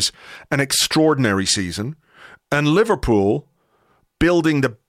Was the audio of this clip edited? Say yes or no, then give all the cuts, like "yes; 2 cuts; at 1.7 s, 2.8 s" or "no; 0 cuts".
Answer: no; 0 cuts